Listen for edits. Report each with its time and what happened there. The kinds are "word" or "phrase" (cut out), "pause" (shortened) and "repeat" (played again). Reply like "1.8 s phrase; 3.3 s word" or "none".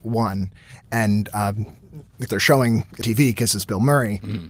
2.3 s word; 3.0 s word